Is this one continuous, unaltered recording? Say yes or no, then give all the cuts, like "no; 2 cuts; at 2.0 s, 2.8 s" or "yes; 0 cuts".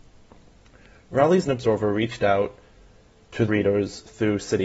no; 2 cuts; at 1.4 s, 3.5 s